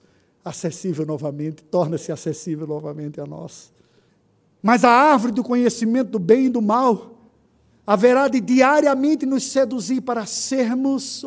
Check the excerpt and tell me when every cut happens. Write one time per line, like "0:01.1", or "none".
0:04.1